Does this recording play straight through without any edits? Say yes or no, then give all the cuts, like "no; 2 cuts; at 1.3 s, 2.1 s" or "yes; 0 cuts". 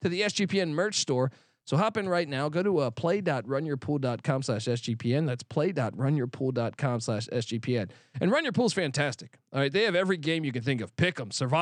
yes; 0 cuts